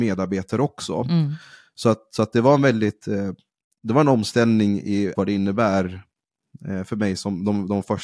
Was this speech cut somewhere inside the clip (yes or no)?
yes